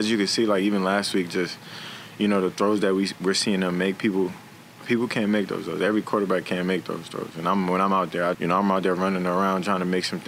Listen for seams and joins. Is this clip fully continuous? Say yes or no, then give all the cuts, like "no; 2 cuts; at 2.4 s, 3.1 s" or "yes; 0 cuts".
no; 1 cut; at 8.3 s